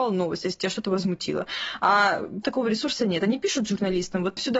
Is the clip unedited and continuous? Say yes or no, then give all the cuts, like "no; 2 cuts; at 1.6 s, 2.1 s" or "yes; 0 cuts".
no; 1 cut; at 2.4 s